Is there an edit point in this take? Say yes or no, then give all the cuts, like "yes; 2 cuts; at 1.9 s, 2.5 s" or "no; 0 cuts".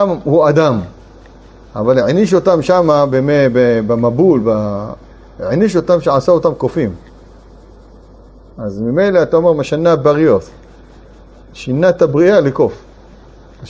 no; 0 cuts